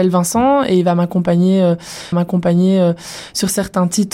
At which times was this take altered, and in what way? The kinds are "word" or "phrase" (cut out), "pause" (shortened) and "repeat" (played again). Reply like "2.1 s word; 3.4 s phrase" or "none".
2.1 s repeat